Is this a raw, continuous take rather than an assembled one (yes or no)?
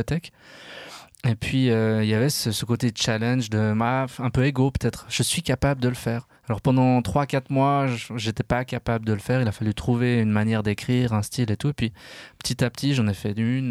no